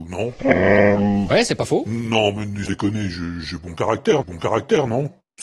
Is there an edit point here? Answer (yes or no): yes